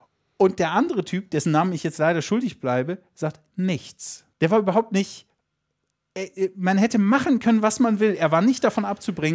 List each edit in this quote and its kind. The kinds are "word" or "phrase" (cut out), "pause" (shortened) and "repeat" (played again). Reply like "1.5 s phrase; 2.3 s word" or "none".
4.3 s pause